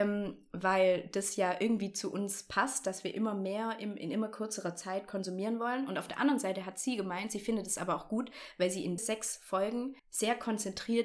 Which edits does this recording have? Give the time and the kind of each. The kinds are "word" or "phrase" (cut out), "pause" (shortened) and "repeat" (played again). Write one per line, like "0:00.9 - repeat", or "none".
0:09.0 - word
0:10.0 - pause